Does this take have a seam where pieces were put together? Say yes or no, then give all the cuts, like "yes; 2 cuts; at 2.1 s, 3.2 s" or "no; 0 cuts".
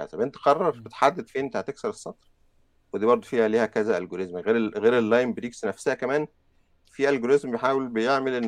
no; 0 cuts